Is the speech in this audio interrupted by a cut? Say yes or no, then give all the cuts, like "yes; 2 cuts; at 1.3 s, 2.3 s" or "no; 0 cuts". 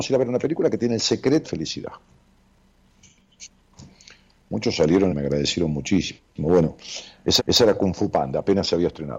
yes; 3 cuts; at 1.4 s, 5.1 s, 7.4 s